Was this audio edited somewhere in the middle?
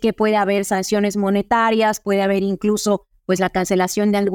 no; 0 cuts

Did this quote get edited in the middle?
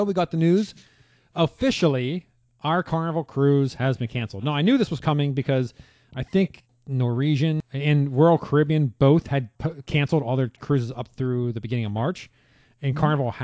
yes; 1 cut; at 9.6 s

